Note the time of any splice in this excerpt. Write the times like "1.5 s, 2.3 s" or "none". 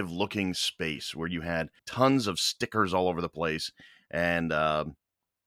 1.8 s